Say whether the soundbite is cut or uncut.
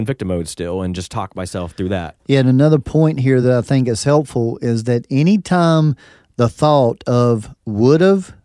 uncut